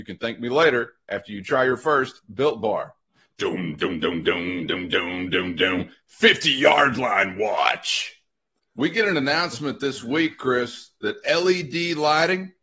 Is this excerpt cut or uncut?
uncut